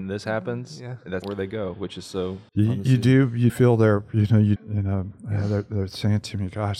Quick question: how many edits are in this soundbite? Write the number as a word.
four